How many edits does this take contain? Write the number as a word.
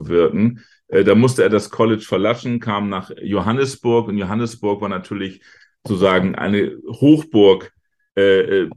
zero